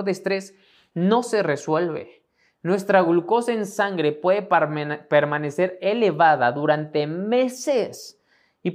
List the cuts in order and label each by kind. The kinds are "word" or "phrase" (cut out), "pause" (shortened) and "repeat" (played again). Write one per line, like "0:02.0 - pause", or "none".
none

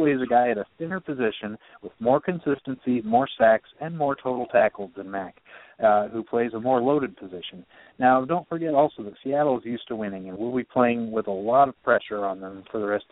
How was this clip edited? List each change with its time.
none

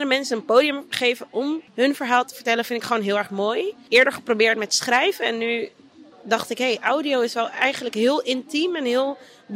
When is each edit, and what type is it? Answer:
0:01.7 - pause
0:06.1 - pause

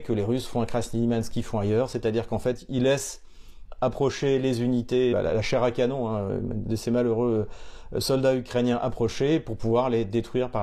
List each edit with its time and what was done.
0:05.1 - word

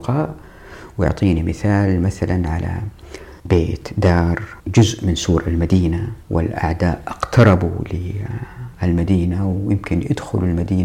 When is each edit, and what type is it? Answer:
0:03.4 - pause
0:04.6 - pause
0:06.2 - pause

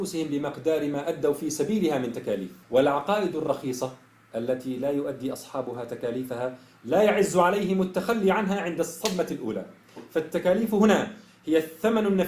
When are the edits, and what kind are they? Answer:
0:02.6 - pause

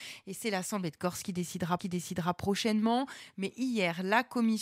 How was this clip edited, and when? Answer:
0:01.8 - repeat

